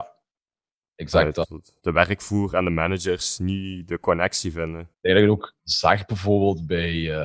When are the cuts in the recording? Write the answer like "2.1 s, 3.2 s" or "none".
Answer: 1.8 s, 4.9 s, 5.6 s